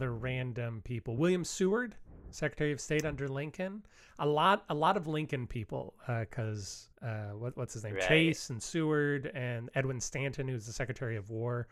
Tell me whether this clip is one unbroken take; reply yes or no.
no